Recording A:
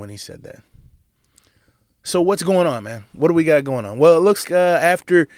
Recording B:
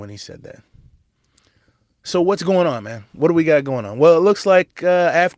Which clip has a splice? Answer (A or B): A